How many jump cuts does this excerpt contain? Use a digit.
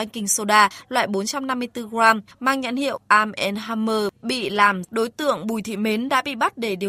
1